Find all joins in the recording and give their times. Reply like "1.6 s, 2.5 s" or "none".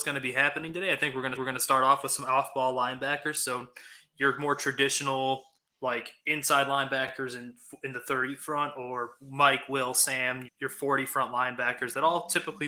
1.3 s, 5.6 s, 10.5 s